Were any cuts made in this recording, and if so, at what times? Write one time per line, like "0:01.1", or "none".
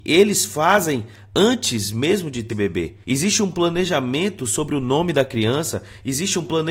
0:02.5
0:03.0